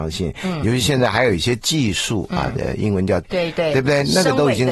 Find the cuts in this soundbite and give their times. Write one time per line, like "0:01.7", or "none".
0:03.2